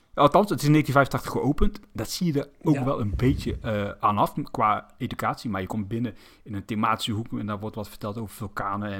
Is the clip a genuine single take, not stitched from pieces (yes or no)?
yes